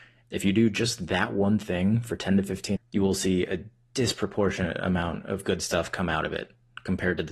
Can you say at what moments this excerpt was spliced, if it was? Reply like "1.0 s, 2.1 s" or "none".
2.8 s